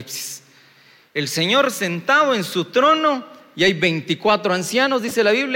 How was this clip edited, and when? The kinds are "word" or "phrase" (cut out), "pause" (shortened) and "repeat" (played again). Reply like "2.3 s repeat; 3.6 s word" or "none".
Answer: none